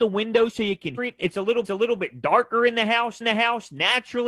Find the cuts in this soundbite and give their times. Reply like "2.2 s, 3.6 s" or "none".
1.0 s, 1.6 s, 3.2 s